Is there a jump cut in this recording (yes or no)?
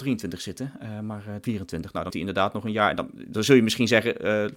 yes